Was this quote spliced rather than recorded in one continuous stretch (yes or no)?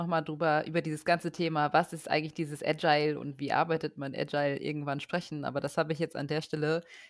no